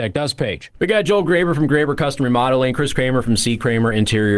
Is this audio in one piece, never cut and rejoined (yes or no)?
yes